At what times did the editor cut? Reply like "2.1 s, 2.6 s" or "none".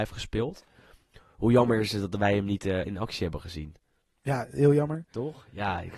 none